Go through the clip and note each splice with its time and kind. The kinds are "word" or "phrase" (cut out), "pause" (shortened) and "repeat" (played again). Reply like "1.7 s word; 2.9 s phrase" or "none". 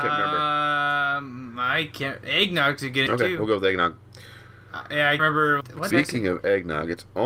3.1 s word; 5.2 s word; 5.6 s word; 5.9 s word